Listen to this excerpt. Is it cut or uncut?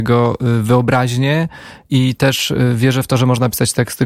cut